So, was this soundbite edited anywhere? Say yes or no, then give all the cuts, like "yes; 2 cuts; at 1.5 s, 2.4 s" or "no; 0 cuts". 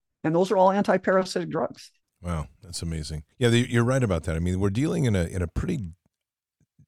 yes; 2 cuts; at 2.0 s, 3.3 s